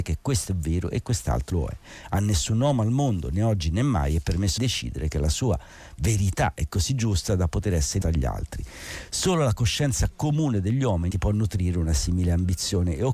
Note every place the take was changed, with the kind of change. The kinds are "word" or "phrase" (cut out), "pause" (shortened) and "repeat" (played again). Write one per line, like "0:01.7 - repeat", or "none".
0:01.5 - word
0:04.6 - word
0:08.0 - word
0:11.1 - word